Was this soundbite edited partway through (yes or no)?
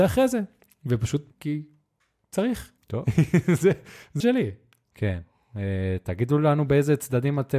yes